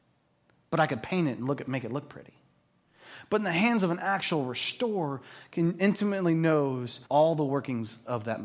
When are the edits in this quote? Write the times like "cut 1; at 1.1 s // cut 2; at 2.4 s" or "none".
cut 1; at 7.0 s